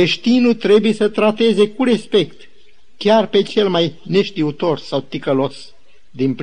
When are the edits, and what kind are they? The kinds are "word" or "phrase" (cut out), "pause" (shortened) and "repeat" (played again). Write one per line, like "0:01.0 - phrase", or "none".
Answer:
none